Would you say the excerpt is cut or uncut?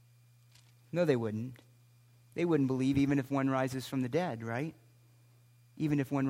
uncut